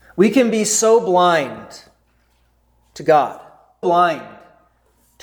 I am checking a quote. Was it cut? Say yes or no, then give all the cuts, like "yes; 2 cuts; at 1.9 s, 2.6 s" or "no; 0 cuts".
yes; 1 cut; at 3.8 s